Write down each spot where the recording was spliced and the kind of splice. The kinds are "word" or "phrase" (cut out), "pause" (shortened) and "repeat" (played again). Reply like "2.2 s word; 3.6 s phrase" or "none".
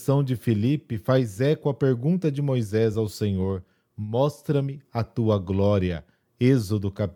none